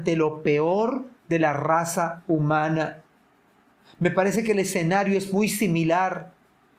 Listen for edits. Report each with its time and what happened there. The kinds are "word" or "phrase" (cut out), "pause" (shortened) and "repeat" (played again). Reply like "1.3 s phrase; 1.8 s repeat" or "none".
none